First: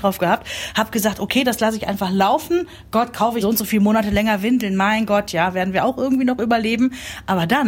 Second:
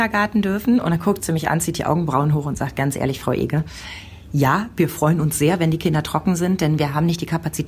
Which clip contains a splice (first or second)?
first